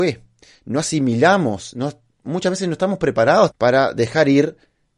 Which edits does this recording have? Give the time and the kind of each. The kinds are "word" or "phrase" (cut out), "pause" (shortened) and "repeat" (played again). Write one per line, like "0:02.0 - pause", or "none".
0:03.5 - word